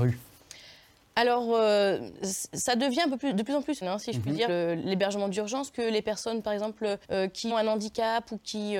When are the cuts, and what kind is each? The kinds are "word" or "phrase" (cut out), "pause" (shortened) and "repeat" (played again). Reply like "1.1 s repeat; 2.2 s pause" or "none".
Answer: 3.8 s word; 4.5 s word; 5.7 s word; 7.0 s pause; 7.5 s word